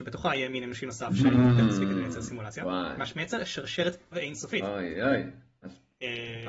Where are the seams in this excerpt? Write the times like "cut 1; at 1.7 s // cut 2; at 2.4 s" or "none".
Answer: cut 1; at 4.1 s

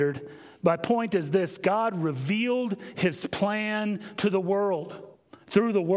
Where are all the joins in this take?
none

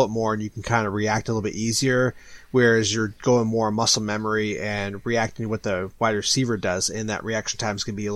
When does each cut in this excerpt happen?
none

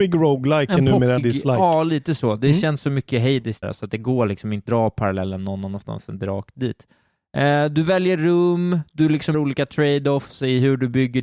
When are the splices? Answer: cut 1; at 1.2 s // cut 2; at 3.6 s // cut 3; at 4.7 s // cut 4; at 9.3 s

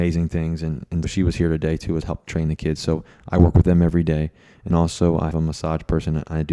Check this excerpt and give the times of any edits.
cut 1; at 1.0 s // cut 2; at 2.0 s // cut 3; at 4.7 s // cut 4; at 5.3 s

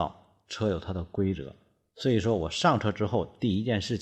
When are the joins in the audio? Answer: none

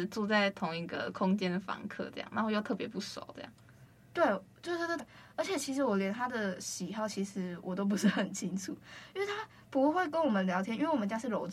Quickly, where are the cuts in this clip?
cut 1; at 5.0 s

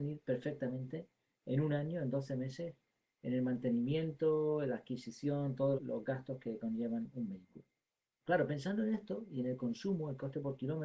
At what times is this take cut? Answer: cut 1; at 5.7 s

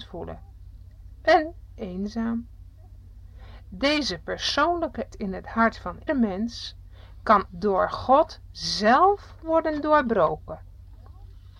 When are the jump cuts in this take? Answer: cut 1; at 1.7 s // cut 2; at 5.1 s // cut 3; at 6.1 s // cut 4; at 7.5 s

